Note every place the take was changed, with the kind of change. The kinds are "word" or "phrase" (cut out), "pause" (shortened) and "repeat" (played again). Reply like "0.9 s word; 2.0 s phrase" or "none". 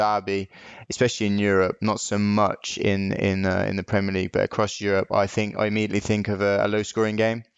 none

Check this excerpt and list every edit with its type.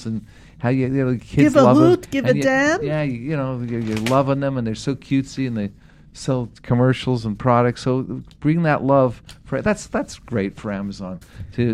none

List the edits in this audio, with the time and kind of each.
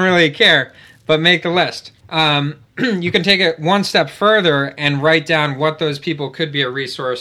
2.0 s pause

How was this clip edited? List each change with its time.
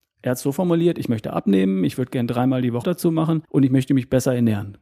2.8 s word; 3.4 s pause

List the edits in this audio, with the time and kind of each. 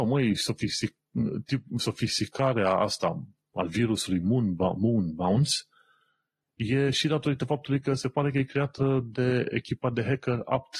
none

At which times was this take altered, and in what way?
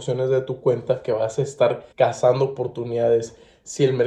1.9 s pause

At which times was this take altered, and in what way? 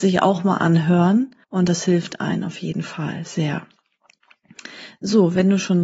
1.4 s pause

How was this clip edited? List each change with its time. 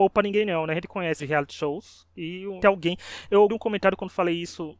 1.2 s word; 2.6 s word; 3.5 s word

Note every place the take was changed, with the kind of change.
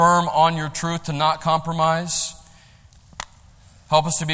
none

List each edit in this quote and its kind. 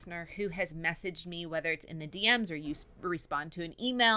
none

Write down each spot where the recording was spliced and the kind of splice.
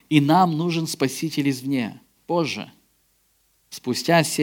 2.1 s pause

